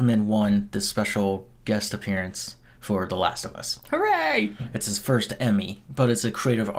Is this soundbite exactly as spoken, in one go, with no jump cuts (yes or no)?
yes